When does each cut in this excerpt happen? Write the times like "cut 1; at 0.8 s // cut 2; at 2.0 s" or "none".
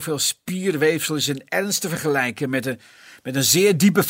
none